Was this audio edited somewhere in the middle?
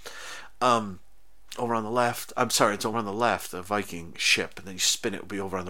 no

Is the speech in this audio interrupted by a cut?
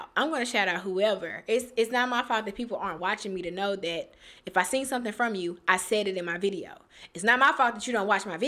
no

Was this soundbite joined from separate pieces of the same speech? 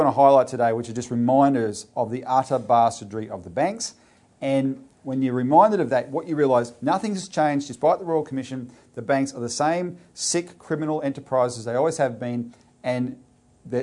no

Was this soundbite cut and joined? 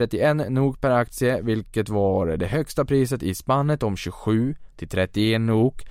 no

